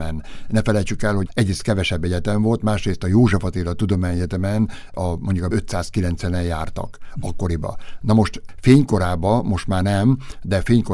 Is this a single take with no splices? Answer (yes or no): no